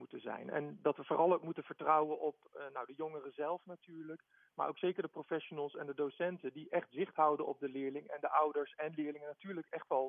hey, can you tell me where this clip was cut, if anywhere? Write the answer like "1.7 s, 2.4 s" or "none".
none